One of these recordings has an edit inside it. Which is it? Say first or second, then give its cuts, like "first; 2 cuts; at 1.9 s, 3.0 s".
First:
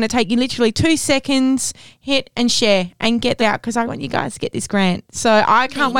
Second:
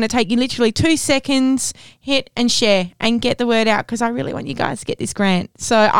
first; 2 cuts; at 3.4 s, 3.9 s